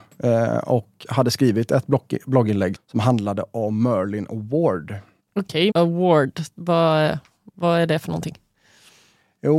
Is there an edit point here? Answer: yes; 3 cuts; at 2.7 s, 5.2 s, 5.7 s

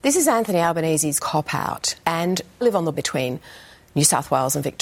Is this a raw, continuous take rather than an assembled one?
no; 3 cuts; at 1.2 s, 2.6 s, 2.9 s

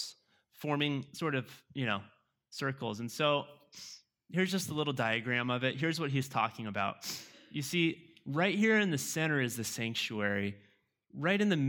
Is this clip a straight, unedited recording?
yes; 0 cuts

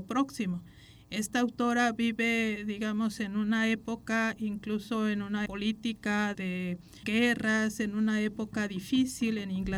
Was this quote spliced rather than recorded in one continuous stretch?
yes; 3 cuts; at 5.5 s, 6.3 s, 7.0 s

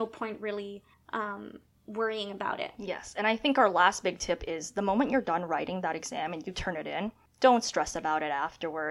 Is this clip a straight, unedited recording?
yes; 0 cuts

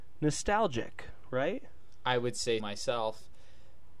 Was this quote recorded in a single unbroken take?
no; 1 cut; at 2.6 s

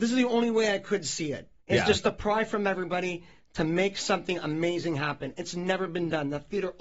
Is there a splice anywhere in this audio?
yes; 1 cut; at 1.6 s

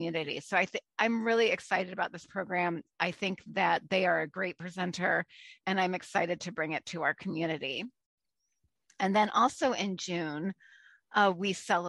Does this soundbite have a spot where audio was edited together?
no; 0 cuts

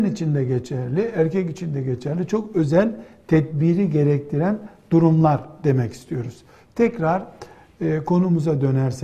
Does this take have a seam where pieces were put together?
no; 0 cuts

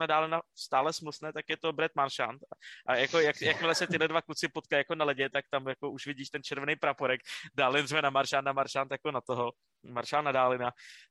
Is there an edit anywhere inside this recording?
no; 0 cuts

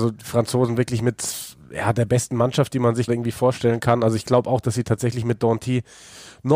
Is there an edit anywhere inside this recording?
yes; 1 cut; at 3.1 s

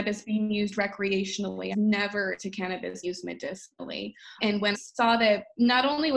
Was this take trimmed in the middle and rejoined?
yes; 5 cuts; at 1.7 s, 2.4 s, 3.0 s, 4.4 s, 4.7 s

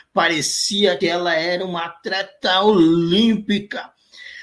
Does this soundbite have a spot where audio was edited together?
yes; 1 cut; at 1.0 s

